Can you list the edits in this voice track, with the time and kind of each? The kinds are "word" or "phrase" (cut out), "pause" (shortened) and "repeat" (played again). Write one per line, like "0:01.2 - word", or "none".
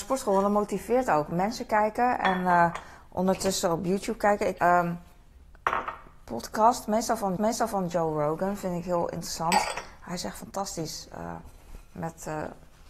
0:04.6 - word
0:07.4 - repeat